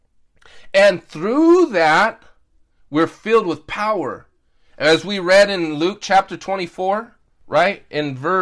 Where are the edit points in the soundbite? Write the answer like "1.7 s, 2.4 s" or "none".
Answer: none